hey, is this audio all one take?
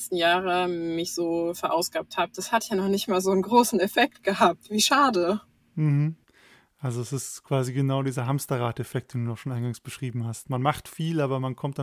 yes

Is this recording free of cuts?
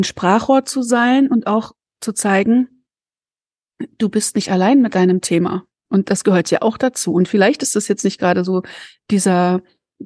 yes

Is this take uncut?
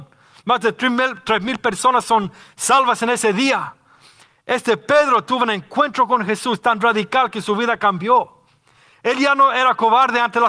yes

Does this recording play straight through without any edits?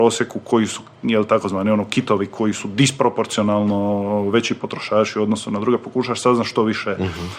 yes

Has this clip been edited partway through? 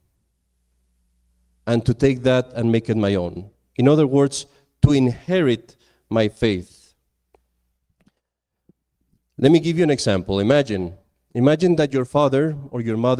no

